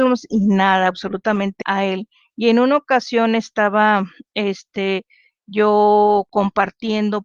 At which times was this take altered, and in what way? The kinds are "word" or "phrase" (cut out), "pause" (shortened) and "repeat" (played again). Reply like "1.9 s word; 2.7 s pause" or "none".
1.6 s phrase